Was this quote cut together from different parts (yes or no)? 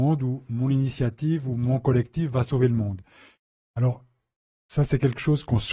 no